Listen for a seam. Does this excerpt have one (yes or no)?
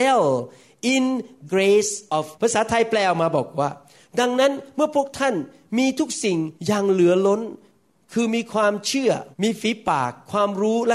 yes